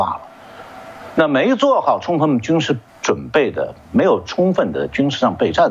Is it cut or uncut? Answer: cut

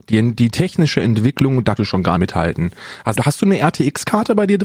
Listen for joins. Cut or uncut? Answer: cut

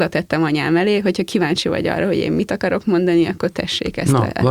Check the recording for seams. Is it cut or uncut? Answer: uncut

